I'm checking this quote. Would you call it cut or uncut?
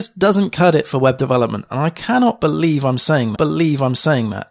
cut